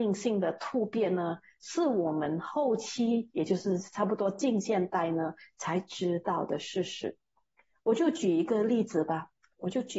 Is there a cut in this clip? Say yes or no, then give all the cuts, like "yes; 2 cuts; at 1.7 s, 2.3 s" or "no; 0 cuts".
no; 0 cuts